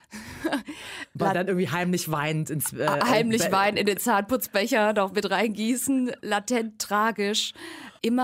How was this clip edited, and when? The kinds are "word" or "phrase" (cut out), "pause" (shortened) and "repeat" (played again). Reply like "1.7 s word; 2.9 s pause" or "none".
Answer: none